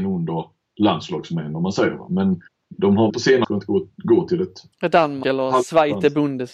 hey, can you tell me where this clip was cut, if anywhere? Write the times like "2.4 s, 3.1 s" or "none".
2.5 s, 3.1 s, 3.4 s, 4.7 s, 5.2 s